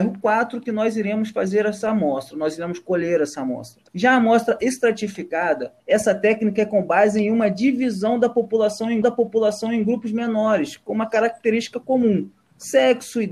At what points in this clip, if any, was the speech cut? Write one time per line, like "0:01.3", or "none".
0:03.9
0:05.8
0:09.0